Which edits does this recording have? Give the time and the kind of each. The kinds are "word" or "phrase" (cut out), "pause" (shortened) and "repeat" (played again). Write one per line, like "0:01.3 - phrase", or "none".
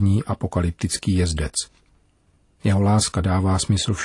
none